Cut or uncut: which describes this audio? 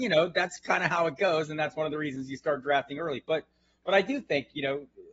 uncut